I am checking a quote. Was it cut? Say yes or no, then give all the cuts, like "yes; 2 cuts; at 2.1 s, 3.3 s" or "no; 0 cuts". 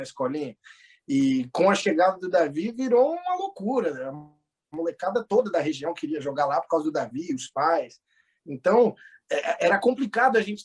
no; 0 cuts